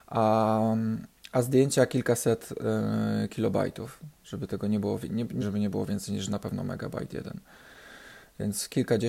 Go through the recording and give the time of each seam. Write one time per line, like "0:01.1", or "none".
0:05.4